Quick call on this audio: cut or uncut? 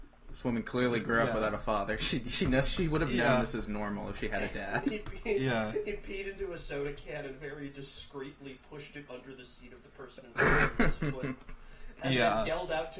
uncut